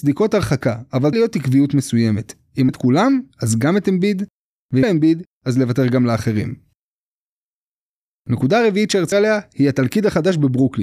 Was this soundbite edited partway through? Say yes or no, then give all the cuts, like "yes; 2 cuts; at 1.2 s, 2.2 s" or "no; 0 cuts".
yes; 4 cuts; at 1.1 s, 2.7 s, 4.8 s, 9.1 s